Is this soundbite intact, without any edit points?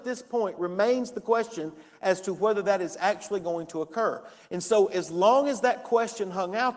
yes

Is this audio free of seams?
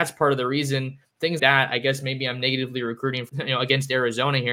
no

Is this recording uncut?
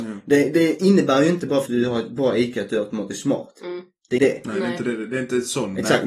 no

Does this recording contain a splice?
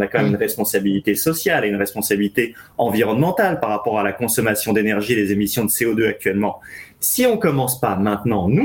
no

